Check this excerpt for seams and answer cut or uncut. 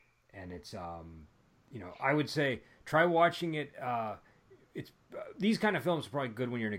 uncut